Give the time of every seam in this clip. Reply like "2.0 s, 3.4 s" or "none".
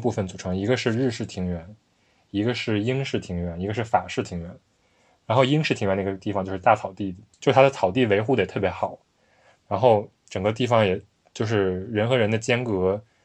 none